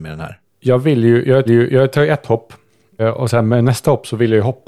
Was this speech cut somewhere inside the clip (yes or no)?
yes